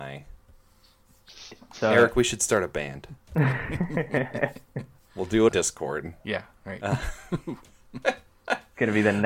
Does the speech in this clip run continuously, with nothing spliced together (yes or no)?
no